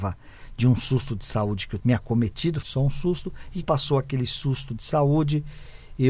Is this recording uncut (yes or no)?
no